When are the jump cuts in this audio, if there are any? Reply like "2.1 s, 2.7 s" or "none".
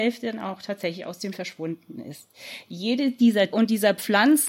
1.3 s, 3.5 s